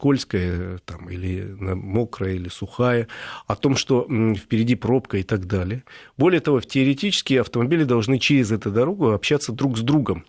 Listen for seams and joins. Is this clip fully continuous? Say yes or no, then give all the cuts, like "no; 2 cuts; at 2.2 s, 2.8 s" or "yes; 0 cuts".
yes; 0 cuts